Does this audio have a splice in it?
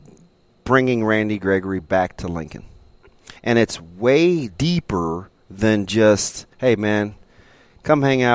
yes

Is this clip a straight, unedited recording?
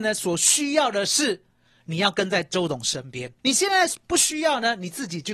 no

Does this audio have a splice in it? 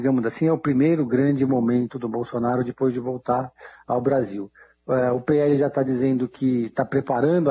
no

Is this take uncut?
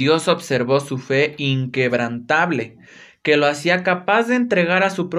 yes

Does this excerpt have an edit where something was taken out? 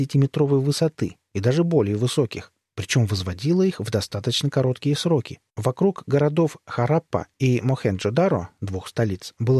yes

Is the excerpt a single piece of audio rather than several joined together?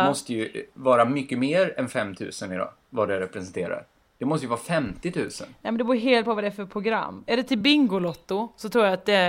yes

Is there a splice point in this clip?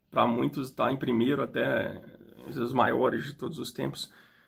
no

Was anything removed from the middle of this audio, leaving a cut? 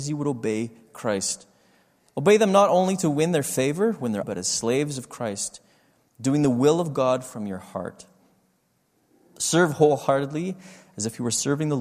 yes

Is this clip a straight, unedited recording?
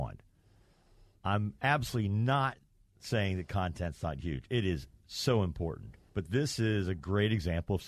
no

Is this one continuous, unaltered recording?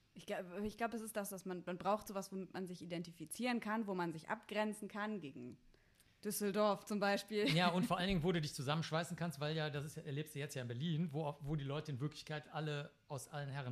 yes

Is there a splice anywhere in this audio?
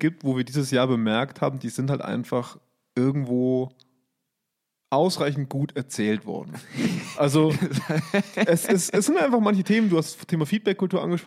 no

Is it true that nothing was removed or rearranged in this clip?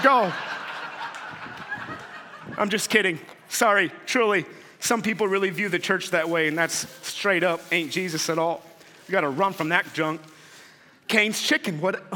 yes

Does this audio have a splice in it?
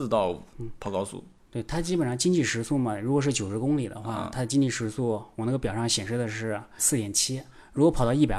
yes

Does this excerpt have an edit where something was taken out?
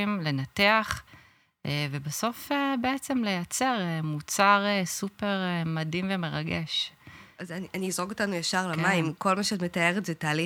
no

